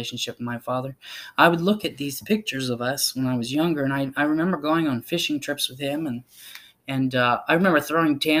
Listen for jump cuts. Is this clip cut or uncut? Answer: uncut